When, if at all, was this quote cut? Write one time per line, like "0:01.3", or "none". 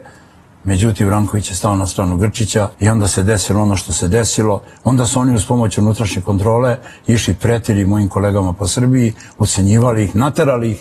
0:02.7